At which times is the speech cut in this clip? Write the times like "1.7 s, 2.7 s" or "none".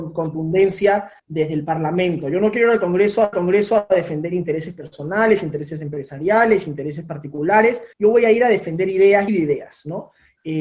1.2 s, 3.3 s, 7.9 s, 9.3 s